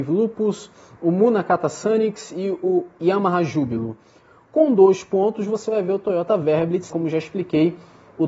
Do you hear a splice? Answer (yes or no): yes